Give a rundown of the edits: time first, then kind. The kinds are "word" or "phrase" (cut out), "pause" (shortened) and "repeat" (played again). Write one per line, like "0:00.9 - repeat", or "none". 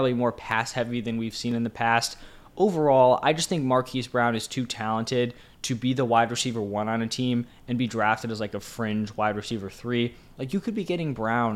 none